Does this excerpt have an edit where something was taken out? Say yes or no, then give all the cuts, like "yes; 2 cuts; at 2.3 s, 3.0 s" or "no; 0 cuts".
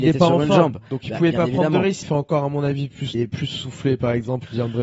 yes; 2 cuts; at 2.0 s, 3.1 s